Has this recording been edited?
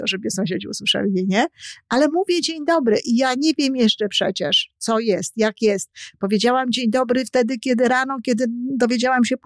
no; 0 cuts

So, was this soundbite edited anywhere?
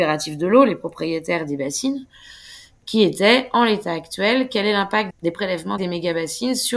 no; 0 cuts

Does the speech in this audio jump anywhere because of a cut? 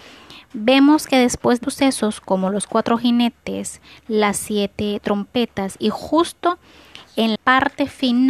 yes; 2 cuts; at 1.6 s, 7.4 s

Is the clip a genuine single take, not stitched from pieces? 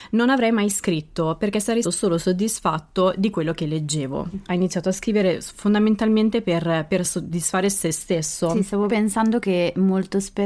no; 3 cuts; at 1.8 s, 4.3 s, 8.9 s

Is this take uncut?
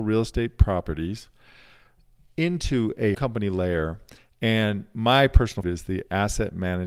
no; 2 cuts; at 3.1 s, 5.6 s

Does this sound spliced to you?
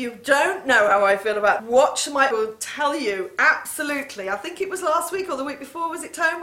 yes; 2 cuts; at 1.6 s, 2.3 s

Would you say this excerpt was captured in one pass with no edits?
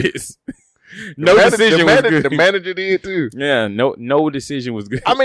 yes; 0 cuts

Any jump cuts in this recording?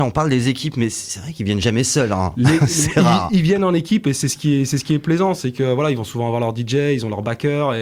no; 0 cuts

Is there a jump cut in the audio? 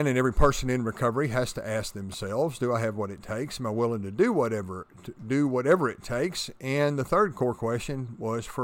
no; 0 cuts

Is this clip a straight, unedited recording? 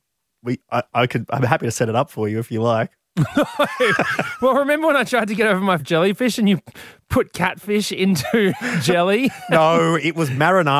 no; 1 cut; at 5.8 s

